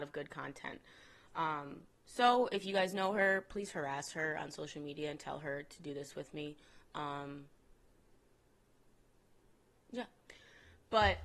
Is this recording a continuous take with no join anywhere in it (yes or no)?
yes